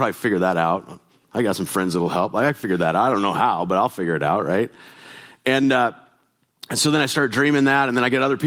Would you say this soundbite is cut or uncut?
uncut